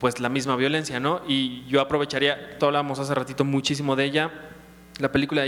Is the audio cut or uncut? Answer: cut